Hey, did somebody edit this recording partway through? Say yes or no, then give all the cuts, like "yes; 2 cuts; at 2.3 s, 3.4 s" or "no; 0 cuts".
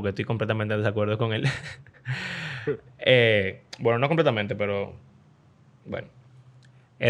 no; 0 cuts